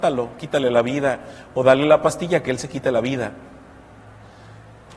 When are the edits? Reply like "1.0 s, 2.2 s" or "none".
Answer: none